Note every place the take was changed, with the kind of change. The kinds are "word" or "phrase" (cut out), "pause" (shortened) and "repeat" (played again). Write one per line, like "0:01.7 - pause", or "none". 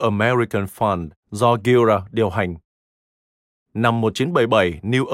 0:01.2 - pause